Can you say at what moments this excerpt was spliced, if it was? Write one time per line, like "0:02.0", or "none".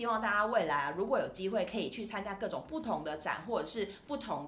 none